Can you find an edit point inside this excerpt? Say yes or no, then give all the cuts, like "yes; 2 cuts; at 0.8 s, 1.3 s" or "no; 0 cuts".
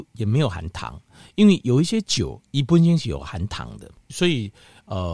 no; 0 cuts